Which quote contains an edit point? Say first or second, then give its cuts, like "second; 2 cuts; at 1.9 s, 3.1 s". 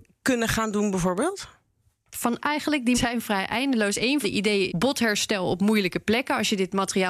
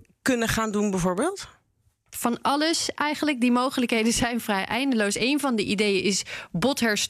first; 4 cuts; at 2.4 s, 2.9 s, 4.2 s, 4.7 s